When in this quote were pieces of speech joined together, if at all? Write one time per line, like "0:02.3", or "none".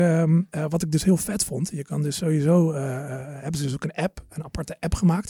none